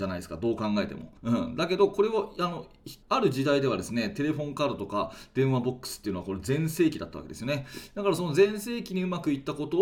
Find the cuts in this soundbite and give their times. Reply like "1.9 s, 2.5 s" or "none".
1.2 s, 3.0 s